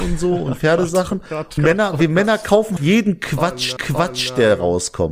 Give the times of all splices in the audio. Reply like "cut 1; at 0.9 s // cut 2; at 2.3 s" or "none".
cut 1; at 1.6 s // cut 2; at 2.8 s // cut 3; at 3.8 s